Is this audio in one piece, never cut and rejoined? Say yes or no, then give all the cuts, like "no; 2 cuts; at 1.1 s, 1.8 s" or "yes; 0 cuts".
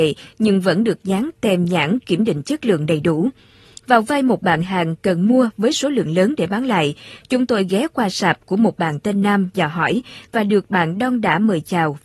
yes; 0 cuts